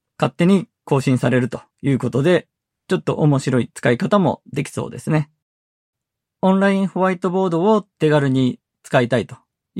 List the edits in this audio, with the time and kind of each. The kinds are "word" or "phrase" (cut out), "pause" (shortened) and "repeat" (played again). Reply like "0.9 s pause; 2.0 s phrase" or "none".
1.7 s pause; 2.7 s pause; 5.9 s pause; 7.9 s pause